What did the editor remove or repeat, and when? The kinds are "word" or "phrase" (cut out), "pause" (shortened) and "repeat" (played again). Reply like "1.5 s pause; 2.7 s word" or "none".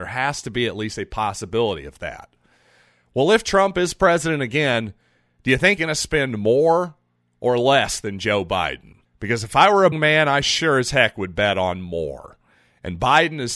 5.8 s word; 9.1 s pause; 9.9 s word